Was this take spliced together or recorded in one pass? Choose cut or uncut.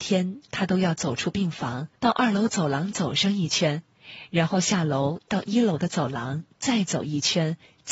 cut